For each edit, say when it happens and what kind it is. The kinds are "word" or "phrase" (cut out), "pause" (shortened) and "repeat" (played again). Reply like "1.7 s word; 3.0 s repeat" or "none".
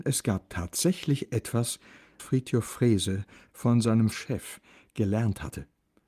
2.2 s word; 4.1 s word